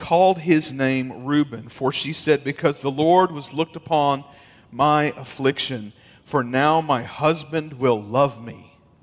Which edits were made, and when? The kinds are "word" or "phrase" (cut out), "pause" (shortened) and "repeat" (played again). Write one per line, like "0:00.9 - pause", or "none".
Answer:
none